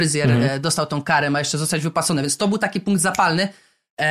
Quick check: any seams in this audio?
no; 0 cuts

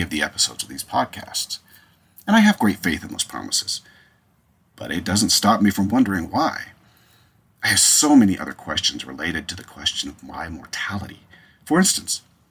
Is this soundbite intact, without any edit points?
yes; 0 cuts

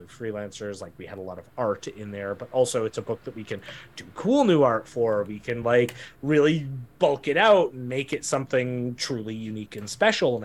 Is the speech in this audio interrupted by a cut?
no; 0 cuts

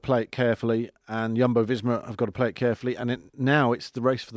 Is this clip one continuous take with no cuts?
yes; 0 cuts

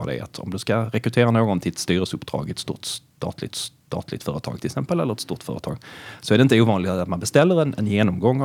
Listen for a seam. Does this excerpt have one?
yes; 1 cut; at 3.5 s

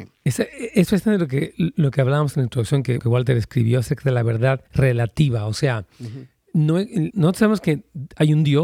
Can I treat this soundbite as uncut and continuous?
no; 3 cuts; at 3.0 s, 4.7 s, 7.1 s

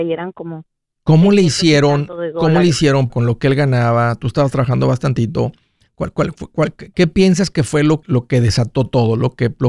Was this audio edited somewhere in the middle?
yes; 2 cuts; at 3.1 s, 8.0 s

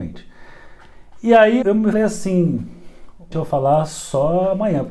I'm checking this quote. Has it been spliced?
yes; 3 cuts; at 1.6 s, 1.9 s, 3.3 s

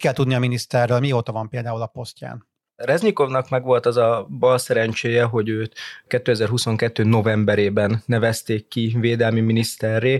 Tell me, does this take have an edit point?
no; 0 cuts

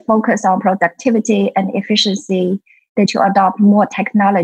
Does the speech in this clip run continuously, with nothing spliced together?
no; 1 cut; at 3.1 s

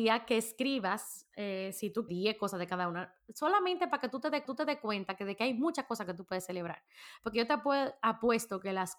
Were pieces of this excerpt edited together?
yes; 2 cuts; at 2.1 s, 4.4 s

